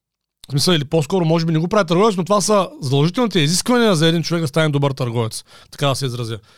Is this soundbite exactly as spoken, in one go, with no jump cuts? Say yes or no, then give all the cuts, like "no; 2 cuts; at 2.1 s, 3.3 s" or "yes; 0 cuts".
yes; 0 cuts